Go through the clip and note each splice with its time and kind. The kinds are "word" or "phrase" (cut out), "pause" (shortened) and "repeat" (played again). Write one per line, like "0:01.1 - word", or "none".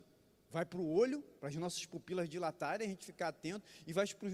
0:01.4 - pause

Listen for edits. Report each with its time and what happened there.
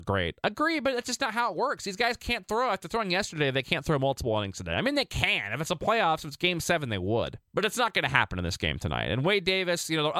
0:07.5 - pause

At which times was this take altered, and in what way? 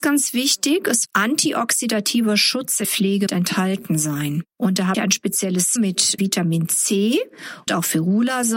0:01.1 - word
0:02.8 - word
0:03.3 - word
0:04.9 - word
0:05.8 - word
0:06.2 - word
0:07.7 - word

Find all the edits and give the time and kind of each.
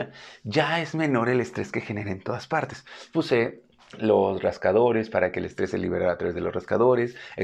0:03.8 - pause

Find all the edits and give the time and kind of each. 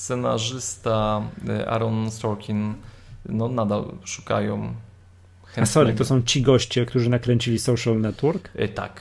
none

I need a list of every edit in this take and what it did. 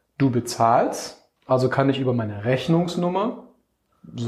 0:01.4 - pause

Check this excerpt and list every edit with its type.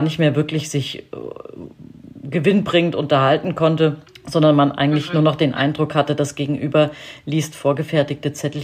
0:04.1 - pause

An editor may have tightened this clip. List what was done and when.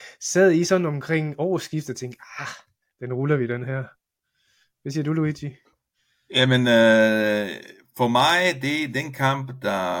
none

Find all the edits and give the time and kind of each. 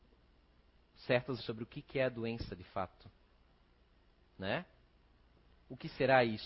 0:01.4 - word

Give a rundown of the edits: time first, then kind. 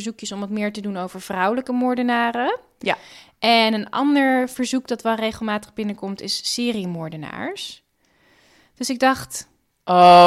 none

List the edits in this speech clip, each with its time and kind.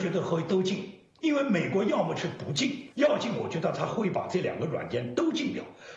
0:02.9 - pause

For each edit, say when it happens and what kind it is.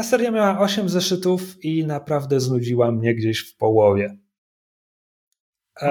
none

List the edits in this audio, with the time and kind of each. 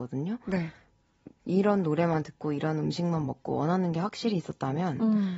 none

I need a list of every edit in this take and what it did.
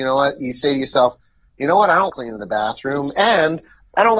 0:02.1 - word

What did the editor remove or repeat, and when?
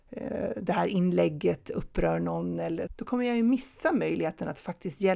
0:02.9 - word

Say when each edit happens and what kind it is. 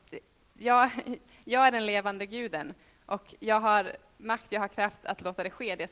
none

